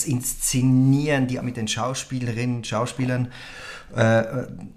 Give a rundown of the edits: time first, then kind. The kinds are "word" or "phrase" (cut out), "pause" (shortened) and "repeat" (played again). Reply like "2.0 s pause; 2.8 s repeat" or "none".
1.4 s word